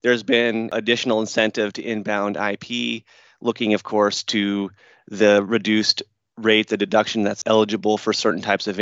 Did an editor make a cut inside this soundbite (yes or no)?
no